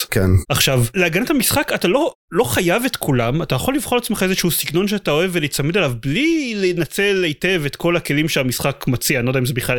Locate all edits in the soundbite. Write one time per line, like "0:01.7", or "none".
0:02.2